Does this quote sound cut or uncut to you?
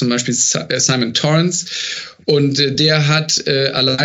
uncut